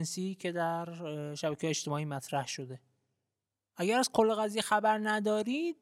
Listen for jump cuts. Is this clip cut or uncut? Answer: uncut